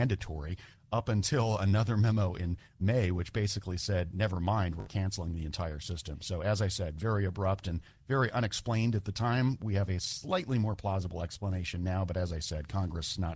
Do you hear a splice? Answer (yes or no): no